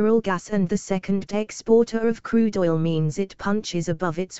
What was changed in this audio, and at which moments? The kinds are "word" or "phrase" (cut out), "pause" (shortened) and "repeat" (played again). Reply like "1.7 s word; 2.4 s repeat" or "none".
1.3 s word